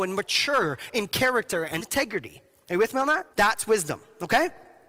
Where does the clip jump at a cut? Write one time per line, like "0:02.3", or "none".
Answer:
0:01.8
0:03.3